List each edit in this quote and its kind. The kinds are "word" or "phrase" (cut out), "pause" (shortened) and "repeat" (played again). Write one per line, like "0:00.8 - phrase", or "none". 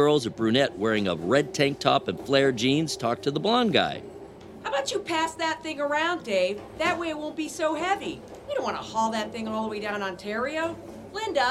none